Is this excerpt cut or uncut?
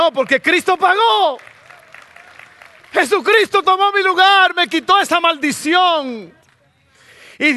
uncut